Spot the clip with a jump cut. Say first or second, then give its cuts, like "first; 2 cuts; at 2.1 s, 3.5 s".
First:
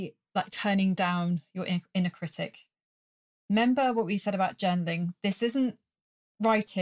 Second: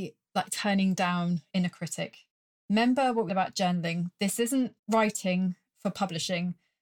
second; 4 cuts; at 1.5 s, 2.3 s, 3.3 s, 4.8 s